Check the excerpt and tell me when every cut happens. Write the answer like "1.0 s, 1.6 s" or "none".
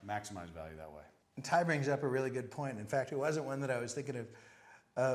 1.2 s